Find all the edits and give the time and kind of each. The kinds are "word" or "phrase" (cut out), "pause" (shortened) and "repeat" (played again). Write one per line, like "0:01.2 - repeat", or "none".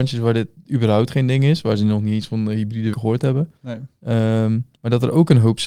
0:02.9 - word
0:03.6 - pause
0:04.7 - pause